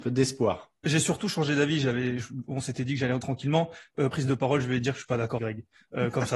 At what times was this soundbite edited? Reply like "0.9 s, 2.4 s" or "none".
3.2 s, 4.1 s, 5.4 s